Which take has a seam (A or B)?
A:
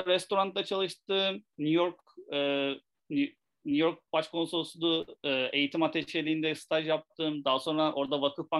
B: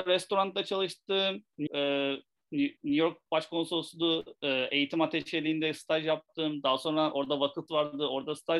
B